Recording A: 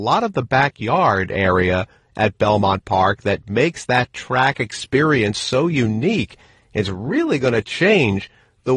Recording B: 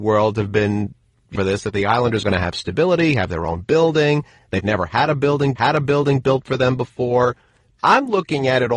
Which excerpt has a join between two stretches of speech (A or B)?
B